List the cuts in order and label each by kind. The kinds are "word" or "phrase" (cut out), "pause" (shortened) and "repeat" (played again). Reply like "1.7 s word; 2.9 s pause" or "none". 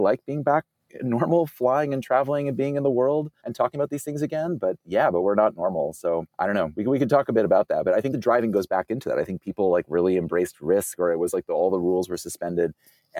3.4 s pause; 6.3 s pause